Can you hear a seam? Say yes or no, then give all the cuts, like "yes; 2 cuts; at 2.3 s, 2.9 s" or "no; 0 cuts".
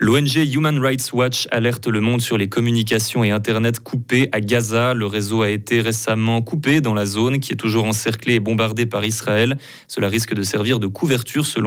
no; 0 cuts